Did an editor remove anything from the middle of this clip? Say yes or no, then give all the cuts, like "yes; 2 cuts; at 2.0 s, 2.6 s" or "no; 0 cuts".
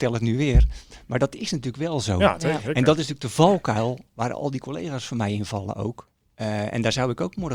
no; 0 cuts